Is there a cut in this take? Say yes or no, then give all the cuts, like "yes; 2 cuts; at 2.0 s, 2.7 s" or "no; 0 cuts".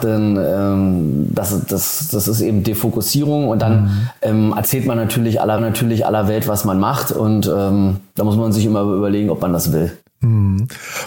yes; 1 cut; at 5.6 s